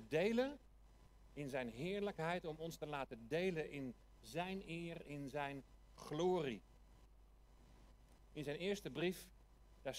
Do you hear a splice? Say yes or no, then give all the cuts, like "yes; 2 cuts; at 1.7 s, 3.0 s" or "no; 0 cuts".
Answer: no; 0 cuts